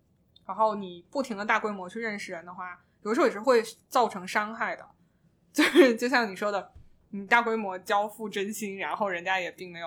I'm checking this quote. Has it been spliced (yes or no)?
no